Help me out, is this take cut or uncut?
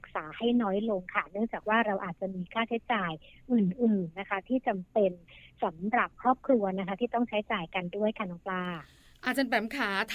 uncut